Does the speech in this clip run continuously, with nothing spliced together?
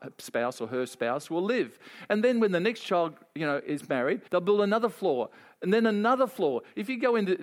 no; 1 cut; at 4.3 s

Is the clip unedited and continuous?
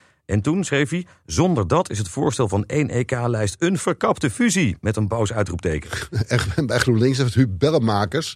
yes; 0 cuts

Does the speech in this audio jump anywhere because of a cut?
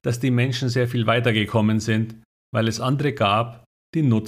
no; 0 cuts

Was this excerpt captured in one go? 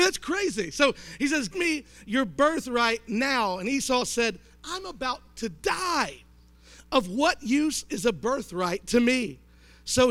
no; 1 cut; at 1.5 s

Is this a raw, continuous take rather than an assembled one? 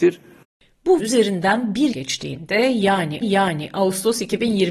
no; 3 cuts; at 1.0 s, 1.9 s, 3.2 s

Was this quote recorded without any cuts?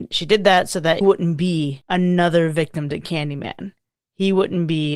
no; 1 cut; at 1.0 s

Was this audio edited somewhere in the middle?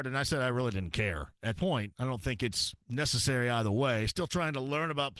yes; 2 cuts; at 1.6 s, 2.8 s

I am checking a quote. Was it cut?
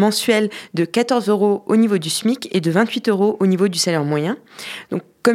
no; 0 cuts

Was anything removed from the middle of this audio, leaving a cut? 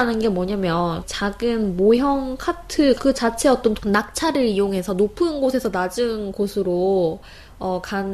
yes; 3 cuts; at 1.0 s, 3.0 s, 3.8 s

